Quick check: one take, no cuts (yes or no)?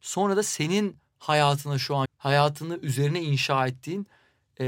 no